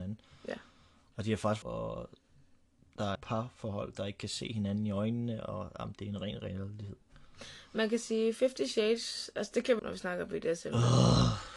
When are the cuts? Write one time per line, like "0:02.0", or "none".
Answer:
0:01.6
0:03.1
0:09.8